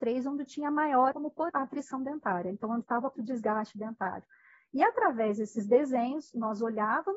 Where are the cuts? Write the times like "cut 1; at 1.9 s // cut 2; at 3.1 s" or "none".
cut 1; at 1.1 s // cut 2; at 1.5 s // cut 3; at 2.8 s // cut 4; at 3.2 s

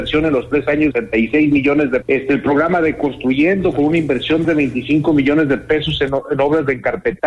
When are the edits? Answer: cut 1; at 0.9 s // cut 2; at 2.0 s // cut 3; at 4.4 s

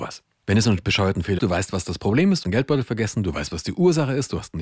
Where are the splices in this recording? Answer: cut 1; at 1.4 s // cut 2; at 2.4 s

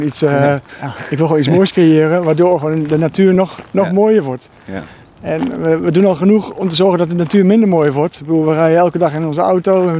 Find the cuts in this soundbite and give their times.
none

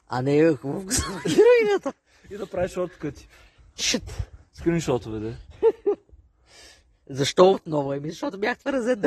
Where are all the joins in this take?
cut 1; at 3.8 s // cut 2; at 7.5 s

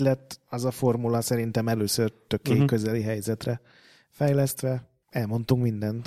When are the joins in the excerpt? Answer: none

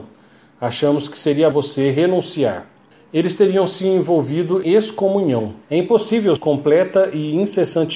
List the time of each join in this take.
cut 1; at 1.5 s // cut 2; at 2.9 s // cut 3; at 4.6 s // cut 4; at 5.6 s // cut 5; at 6.4 s

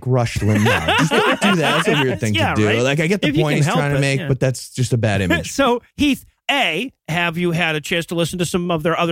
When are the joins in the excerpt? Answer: cut 1; at 5.9 s // cut 2; at 7.0 s

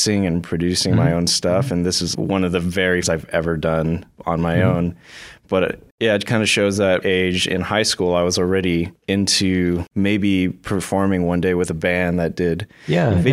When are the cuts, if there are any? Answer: cut 1; at 2.1 s // cut 2; at 3.0 s // cut 3; at 4.1 s // cut 4; at 7.0 s

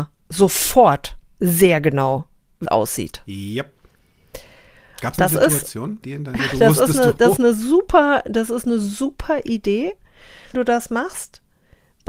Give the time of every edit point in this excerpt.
cut 1; at 2.7 s // cut 2; at 5.2 s // cut 3; at 6.0 s // cut 4; at 6.4 s // cut 5; at 7.4 s // cut 6; at 10.5 s

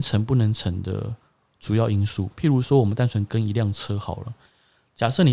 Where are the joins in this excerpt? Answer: none

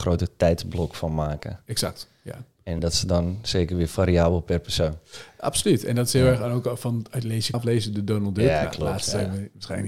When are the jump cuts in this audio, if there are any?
cut 1; at 2.8 s // cut 2; at 7.5 s

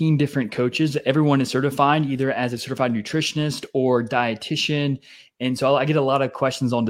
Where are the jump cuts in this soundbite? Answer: none

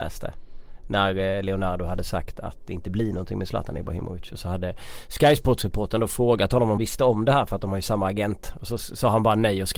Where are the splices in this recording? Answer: cut 1; at 6.8 s

